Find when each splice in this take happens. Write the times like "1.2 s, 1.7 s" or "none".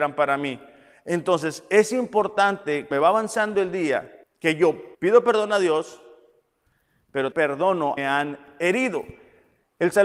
2.9 s, 4.2 s, 4.9 s, 7.3 s, 8.0 s